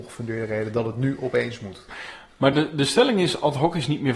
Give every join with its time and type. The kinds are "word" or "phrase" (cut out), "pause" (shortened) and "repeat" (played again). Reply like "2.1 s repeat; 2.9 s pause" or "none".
none

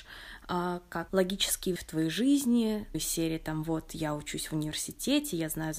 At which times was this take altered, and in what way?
1.1 s phrase; 1.8 s word; 2.9 s word

